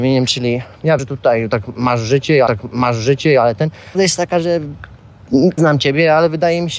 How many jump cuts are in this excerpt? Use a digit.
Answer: 4